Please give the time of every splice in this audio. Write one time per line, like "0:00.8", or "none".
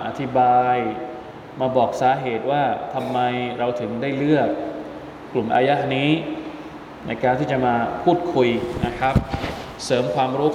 none